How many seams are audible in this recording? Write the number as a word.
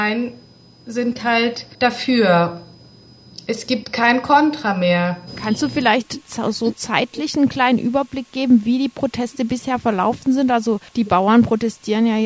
two